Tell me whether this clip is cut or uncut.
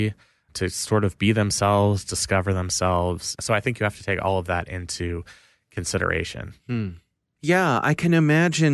uncut